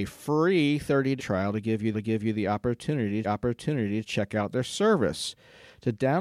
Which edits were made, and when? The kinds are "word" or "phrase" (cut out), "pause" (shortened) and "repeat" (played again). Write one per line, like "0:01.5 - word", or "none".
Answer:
0:01.2 - word
0:01.9 - repeat
0:03.2 - repeat